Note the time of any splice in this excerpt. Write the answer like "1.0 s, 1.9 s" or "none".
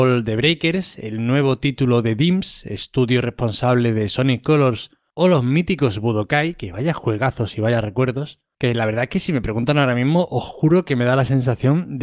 none